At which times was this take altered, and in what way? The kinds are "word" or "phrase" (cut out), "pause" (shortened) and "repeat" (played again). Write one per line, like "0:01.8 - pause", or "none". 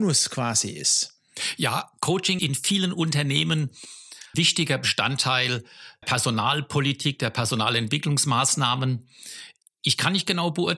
0:02.4 - word
0:04.3 - word
0:06.0 - word